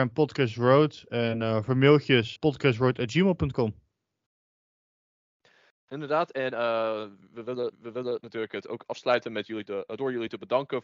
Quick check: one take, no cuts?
no; 2 cuts; at 2.4 s, 7.7 s

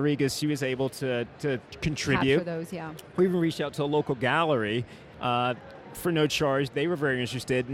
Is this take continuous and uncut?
yes; 0 cuts

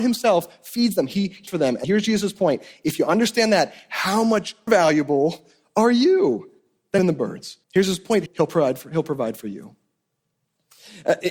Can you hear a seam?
yes; 6 cuts; at 1.5 s, 1.8 s, 4.7 s, 7.0 s, 7.6 s, 8.3 s

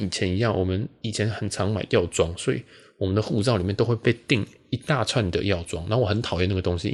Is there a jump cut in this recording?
no; 0 cuts

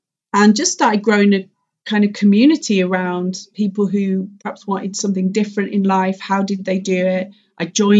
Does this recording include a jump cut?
no; 0 cuts

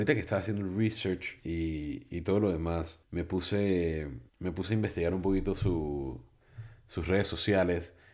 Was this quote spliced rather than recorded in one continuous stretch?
yes; 3 cuts; at 1.4 s, 3.0 s, 4.3 s

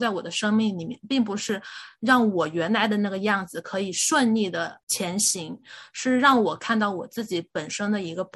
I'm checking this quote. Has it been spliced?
yes; 1 cut; at 4.8 s

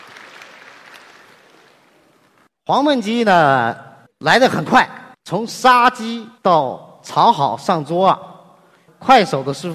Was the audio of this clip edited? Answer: yes; 3 cuts; at 4.1 s, 5.1 s, 6.4 s

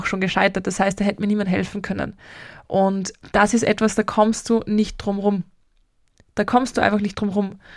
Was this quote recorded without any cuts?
yes; 0 cuts

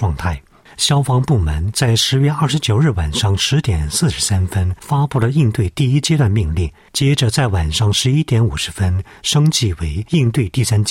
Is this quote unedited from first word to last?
yes; 0 cuts

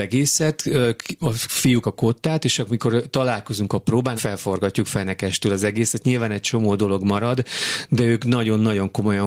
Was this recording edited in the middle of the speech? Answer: yes; 2 cuts; at 1.8 s, 4.2 s

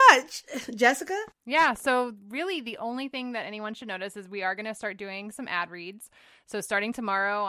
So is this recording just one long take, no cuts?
yes; 0 cuts

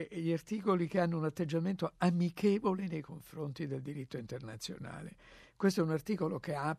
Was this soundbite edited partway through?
no; 0 cuts

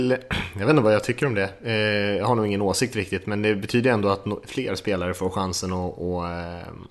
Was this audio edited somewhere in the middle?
no; 0 cuts

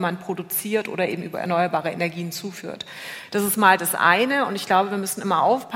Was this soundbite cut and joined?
no; 0 cuts

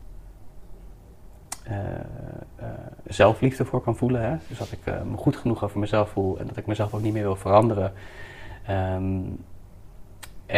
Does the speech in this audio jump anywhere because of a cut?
no; 0 cuts

